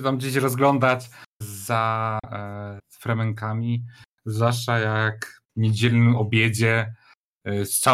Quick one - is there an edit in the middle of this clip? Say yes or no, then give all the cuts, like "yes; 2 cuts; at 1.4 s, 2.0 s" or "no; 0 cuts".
yes; 3 cuts; at 1.4 s, 2.8 s, 5.4 s